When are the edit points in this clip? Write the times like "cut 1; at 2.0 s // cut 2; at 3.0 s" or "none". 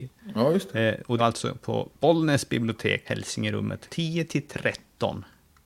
cut 1; at 1.2 s // cut 2; at 1.9 s // cut 3; at 3.0 s // cut 4; at 3.9 s